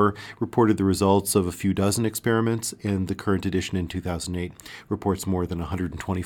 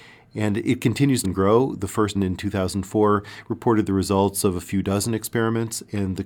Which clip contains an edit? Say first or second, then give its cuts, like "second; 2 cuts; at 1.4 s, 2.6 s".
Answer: second; 2 cuts; at 1.2 s, 2.1 s